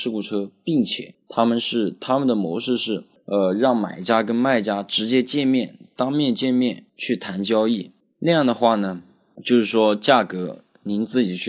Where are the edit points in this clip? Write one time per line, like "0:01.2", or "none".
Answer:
0:06.9